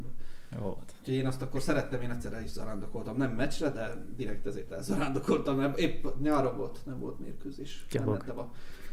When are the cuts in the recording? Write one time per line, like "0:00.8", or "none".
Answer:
none